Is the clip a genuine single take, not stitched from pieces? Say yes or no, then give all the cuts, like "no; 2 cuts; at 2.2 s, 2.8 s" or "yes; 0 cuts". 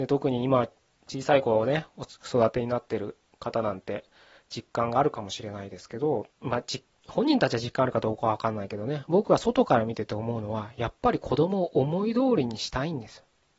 no; 1 cut; at 6.3 s